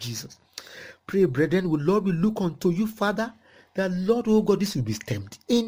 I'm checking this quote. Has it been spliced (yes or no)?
no